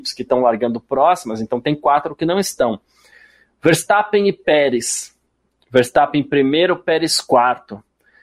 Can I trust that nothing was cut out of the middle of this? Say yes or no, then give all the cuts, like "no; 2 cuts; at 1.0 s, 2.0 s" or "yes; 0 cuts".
yes; 0 cuts